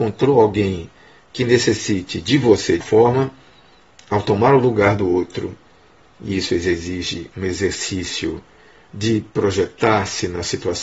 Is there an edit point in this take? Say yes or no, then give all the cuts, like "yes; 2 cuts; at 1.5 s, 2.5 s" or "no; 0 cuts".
yes; 1 cut; at 2.8 s